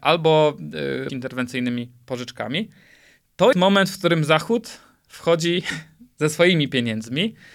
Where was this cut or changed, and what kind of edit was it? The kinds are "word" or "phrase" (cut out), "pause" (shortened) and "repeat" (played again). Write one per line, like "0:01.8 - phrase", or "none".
0:01.1 - phrase
0:03.5 - word